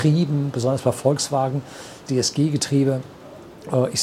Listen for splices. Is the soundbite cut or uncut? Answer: cut